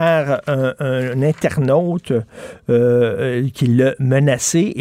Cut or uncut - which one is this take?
uncut